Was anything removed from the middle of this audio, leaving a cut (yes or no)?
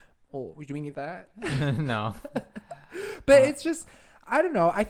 yes